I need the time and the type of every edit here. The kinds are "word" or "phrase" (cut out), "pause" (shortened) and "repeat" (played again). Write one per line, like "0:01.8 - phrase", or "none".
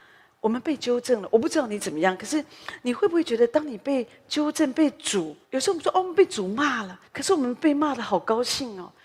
0:05.4 - pause
0:07.1 - pause

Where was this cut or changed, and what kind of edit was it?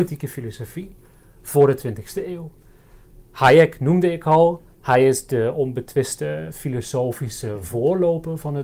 none

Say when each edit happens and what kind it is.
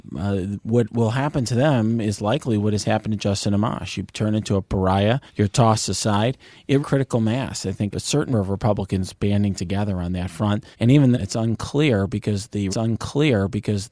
0:05.3 - pause
0:06.8 - phrase
0:07.9 - word
0:08.3 - word
0:10.7 - pause
0:11.1 - word
0:12.7 - repeat

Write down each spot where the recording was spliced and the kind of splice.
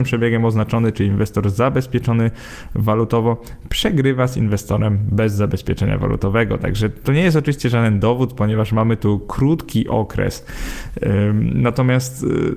none

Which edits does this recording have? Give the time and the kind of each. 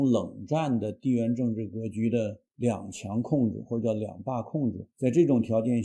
0:02.5 - pause
0:04.9 - pause

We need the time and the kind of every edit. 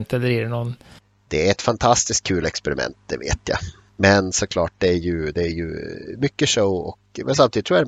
0:03.9 - pause

